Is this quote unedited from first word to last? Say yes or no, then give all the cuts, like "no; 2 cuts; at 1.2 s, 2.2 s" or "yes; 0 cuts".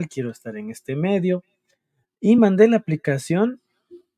yes; 0 cuts